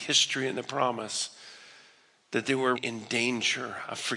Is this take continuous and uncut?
no; 1 cut; at 2.8 s

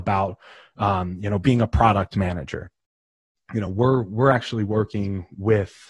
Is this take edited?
no; 0 cuts

